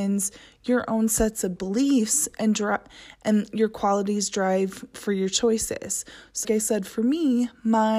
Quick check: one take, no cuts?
no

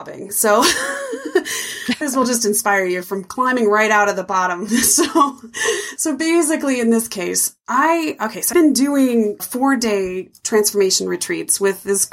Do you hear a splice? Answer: yes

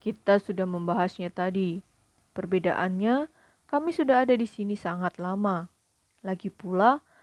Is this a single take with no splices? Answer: yes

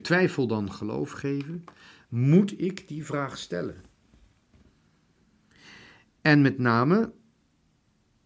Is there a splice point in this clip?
no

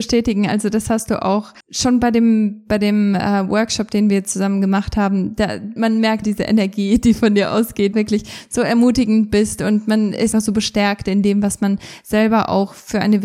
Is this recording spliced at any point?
yes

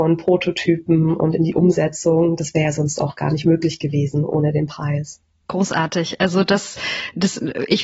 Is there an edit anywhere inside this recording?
no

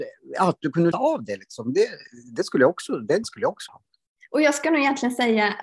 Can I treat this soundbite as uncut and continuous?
no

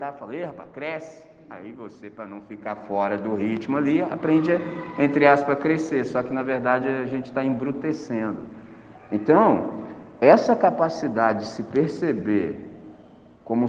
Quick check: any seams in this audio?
no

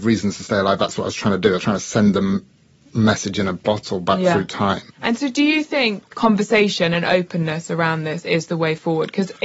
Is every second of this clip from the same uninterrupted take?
no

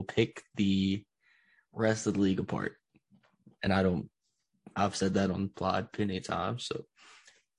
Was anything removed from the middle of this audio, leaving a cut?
no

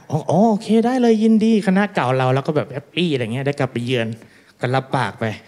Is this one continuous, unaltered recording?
no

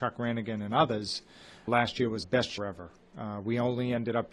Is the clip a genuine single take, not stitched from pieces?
no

